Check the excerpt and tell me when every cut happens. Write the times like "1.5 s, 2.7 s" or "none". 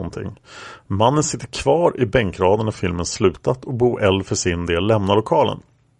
none